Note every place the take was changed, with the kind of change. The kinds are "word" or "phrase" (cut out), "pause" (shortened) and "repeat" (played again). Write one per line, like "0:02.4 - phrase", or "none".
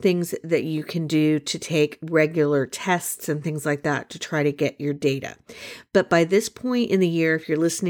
none

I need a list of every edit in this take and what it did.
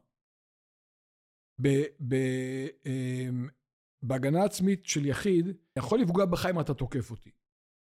0:05.8 - word

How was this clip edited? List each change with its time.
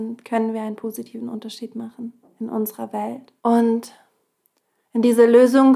0:03.4 - pause

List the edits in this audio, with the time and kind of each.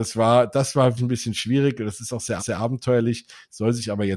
0:01.0 - word
0:02.4 - repeat

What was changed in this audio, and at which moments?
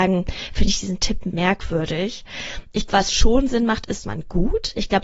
0:01.3 - word
0:02.9 - word
0:04.0 - phrase

